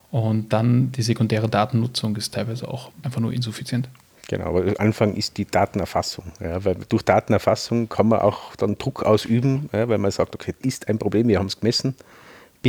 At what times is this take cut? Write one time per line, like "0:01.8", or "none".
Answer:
0:03.0
0:04.8
0:10.6